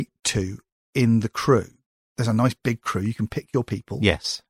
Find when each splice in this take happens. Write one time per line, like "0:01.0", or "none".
none